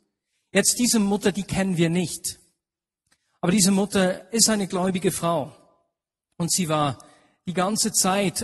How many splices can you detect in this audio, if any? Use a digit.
0